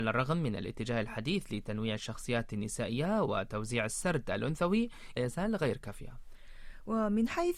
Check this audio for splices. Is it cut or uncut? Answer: cut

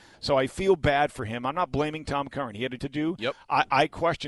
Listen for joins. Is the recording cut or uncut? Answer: cut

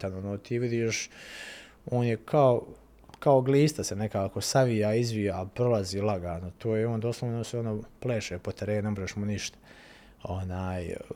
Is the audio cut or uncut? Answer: uncut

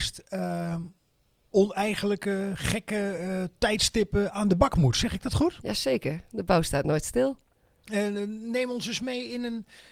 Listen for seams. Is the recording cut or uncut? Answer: uncut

